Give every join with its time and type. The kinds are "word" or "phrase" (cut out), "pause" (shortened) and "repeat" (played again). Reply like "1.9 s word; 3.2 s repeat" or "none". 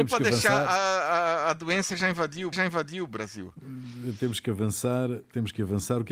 2.5 s repeat